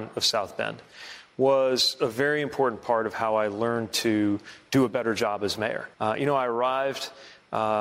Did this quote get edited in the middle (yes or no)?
yes